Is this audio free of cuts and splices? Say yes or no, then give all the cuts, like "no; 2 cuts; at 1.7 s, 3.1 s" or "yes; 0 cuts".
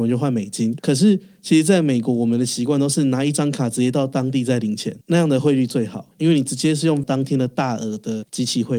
no; 2 cuts; at 5.0 s, 7.0 s